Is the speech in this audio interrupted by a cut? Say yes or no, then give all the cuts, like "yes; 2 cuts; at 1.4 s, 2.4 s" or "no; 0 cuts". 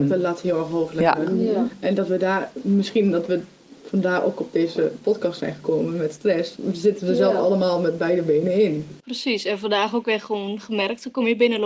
no; 0 cuts